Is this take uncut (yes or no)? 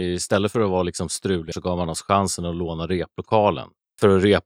no